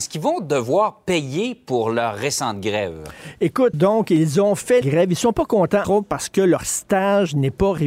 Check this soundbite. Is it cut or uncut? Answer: cut